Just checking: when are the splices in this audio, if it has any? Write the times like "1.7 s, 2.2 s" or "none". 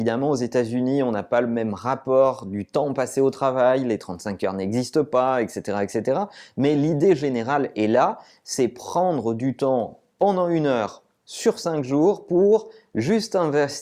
none